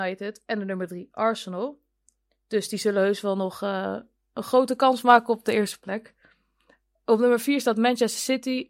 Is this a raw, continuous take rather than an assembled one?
yes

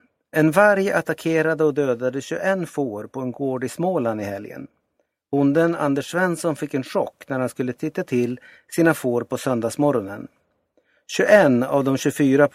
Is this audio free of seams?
yes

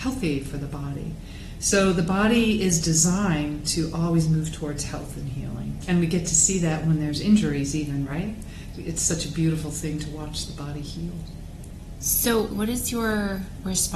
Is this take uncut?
yes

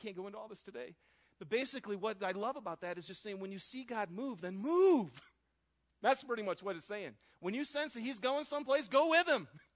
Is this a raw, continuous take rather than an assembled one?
yes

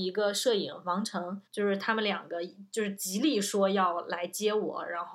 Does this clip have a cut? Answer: yes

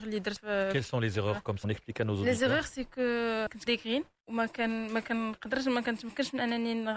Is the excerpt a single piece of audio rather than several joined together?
no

